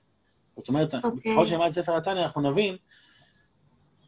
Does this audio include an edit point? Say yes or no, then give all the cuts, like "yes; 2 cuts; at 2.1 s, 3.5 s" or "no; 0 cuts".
no; 0 cuts